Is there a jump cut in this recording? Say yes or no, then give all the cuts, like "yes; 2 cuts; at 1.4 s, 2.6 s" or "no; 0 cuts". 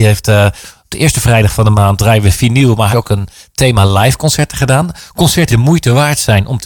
yes; 2 cuts; at 2.9 s, 5.5 s